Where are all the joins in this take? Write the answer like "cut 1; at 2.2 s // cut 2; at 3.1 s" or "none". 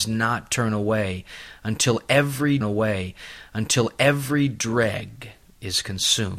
cut 1; at 2.6 s